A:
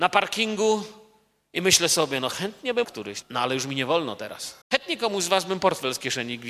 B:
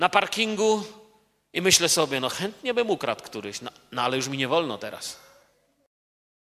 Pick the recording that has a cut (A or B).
A